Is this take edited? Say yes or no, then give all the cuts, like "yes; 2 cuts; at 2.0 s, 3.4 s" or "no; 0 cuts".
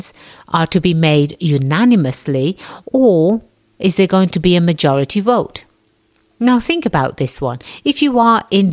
no; 0 cuts